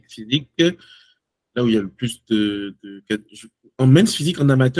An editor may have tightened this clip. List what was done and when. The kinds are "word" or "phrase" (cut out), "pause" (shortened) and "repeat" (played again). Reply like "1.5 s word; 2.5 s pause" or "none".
none